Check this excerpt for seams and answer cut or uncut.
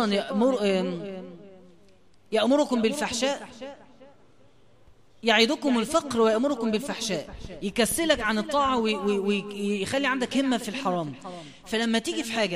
uncut